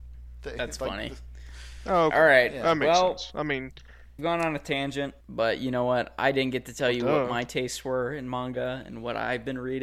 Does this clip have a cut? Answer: yes; 2 cuts; at 4.2 s, 5.2 s

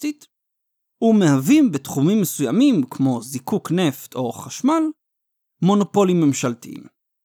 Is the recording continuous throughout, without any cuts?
yes; 0 cuts

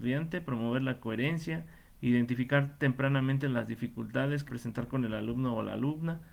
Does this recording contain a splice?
yes; 1 cut; at 4.5 s

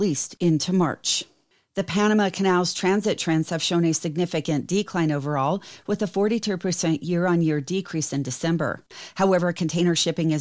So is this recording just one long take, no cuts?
yes; 0 cuts

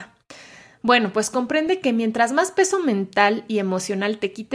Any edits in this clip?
no; 0 cuts

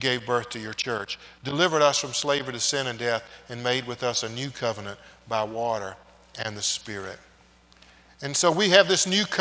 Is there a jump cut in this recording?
no; 0 cuts

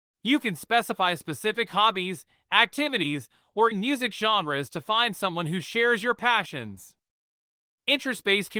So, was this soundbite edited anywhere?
yes; 1 cut; at 3.7 s

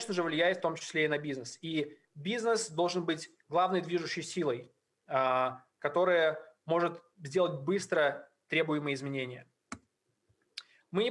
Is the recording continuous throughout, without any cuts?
yes; 0 cuts

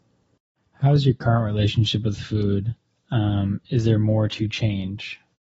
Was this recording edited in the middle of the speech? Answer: yes; 1 cut; at 2.8 s

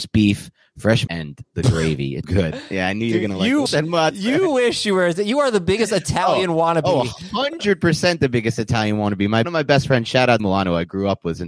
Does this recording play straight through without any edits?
no; 5 cuts; at 1.1 s, 2.2 s, 3.7 s, 9.4 s, 10.4 s

